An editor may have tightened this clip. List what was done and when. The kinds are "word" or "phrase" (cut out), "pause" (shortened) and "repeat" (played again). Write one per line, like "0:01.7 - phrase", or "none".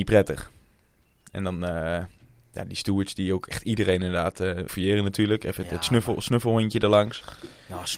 0:04.7 - word